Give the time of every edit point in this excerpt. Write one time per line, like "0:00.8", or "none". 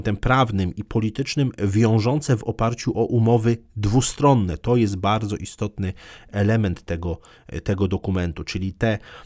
none